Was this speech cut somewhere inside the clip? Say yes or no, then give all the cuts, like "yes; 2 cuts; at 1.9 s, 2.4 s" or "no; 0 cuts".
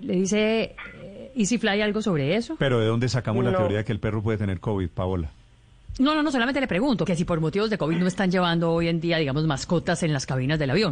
yes; 1 cut; at 7.1 s